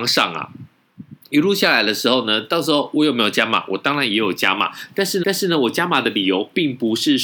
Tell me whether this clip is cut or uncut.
cut